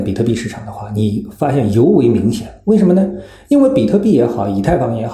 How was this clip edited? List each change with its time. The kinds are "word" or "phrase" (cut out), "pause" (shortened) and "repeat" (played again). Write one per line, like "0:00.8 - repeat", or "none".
none